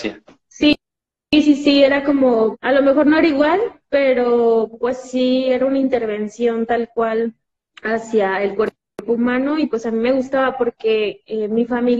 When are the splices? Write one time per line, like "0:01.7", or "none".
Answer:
0:02.5